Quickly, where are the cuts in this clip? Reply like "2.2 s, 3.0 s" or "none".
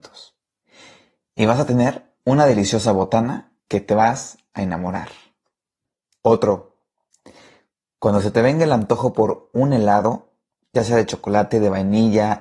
3.6 s